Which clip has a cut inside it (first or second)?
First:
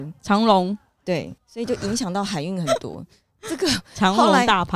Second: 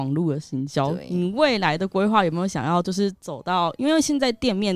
first